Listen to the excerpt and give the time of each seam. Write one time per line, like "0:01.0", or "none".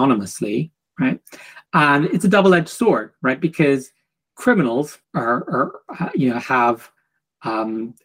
0:01.7
0:05.0